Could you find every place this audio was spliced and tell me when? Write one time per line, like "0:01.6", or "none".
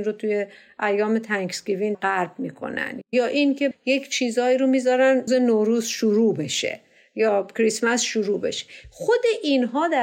0:01.9
0:03.7
0:05.3